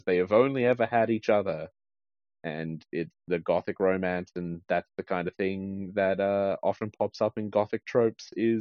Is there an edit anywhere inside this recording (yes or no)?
no